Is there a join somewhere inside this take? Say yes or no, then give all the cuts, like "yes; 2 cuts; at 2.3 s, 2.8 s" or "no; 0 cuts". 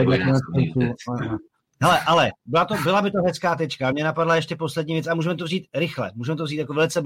no; 0 cuts